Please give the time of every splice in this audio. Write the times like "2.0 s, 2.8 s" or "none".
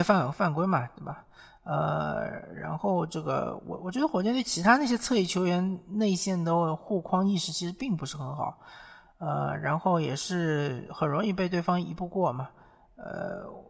none